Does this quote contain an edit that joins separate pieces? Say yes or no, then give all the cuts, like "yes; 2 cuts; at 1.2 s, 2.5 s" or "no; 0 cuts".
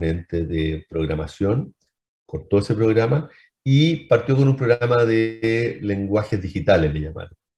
no; 0 cuts